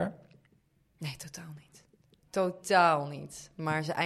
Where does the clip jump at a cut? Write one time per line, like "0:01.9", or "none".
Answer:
none